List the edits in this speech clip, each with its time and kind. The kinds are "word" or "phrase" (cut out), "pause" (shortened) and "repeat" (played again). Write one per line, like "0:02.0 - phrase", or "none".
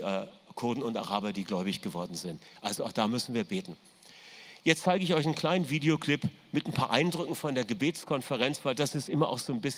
none